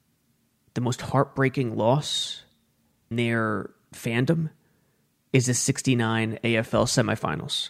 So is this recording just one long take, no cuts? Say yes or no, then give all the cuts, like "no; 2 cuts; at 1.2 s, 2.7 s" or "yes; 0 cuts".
no; 1 cut; at 3.1 s